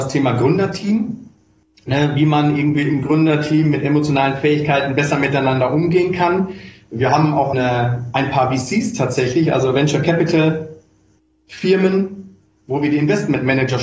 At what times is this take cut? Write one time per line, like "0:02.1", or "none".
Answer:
0:07.5